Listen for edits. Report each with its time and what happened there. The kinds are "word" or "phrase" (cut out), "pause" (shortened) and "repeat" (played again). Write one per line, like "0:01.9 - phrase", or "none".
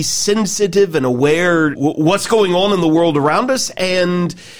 0:01.8 - word

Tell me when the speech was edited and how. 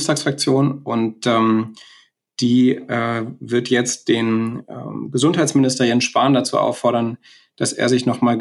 none

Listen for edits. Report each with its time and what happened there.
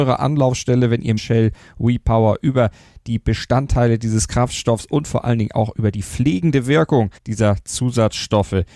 0:01.2 - phrase
0:07.2 - pause

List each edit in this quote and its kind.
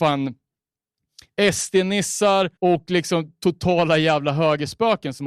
0:02.6 - pause

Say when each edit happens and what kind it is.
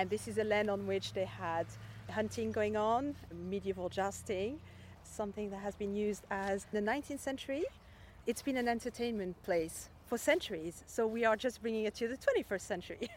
0:05.0 - word
0:06.7 - phrase

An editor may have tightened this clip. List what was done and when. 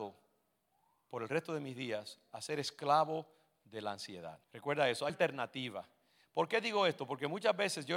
0:04.4 - pause
0:05.1 - word

